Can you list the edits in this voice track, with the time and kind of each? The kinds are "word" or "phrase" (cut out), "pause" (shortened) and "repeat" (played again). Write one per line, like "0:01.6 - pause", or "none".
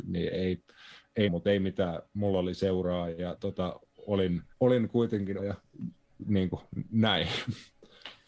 0:01.3 - word
0:04.5 - pause
0:05.4 - phrase